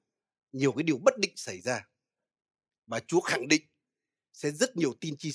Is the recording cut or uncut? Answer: uncut